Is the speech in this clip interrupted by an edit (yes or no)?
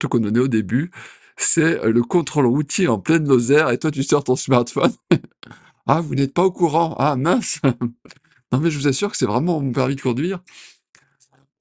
no